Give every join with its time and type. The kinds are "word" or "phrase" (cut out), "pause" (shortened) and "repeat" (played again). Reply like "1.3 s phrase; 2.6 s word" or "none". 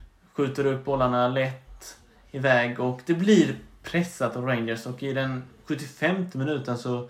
none